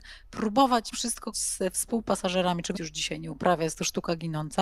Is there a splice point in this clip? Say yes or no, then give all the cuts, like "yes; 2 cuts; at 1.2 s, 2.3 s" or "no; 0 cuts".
yes; 3 cuts; at 0.9 s, 1.3 s, 2.7 s